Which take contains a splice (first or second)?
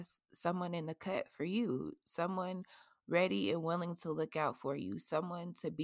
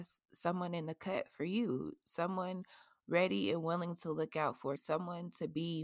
second